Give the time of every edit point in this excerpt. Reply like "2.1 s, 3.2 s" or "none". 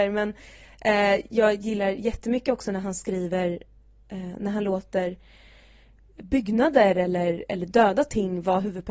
none

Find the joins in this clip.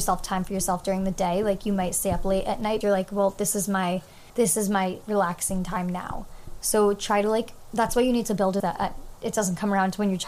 2.8 s, 4.3 s, 8.6 s

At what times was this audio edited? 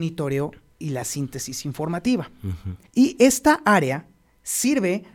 2.9 s

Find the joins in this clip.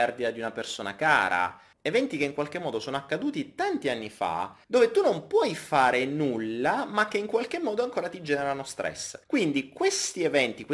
1.7 s, 4.6 s, 9.2 s

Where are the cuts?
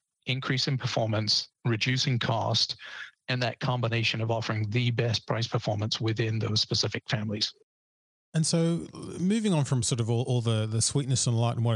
1.5 s

